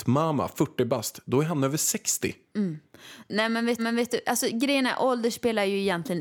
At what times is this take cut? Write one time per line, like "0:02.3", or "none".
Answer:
0:02.5
0:03.8